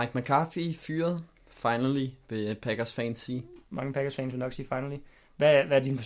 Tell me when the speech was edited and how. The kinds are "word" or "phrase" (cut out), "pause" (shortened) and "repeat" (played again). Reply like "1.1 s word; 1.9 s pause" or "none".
none